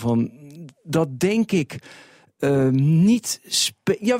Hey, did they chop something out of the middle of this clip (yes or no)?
no